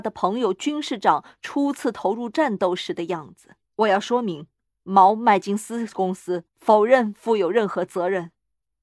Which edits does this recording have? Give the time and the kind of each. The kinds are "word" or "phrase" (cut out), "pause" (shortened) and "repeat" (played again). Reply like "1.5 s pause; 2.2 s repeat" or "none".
3.6 s pause; 4.6 s pause; 6.5 s pause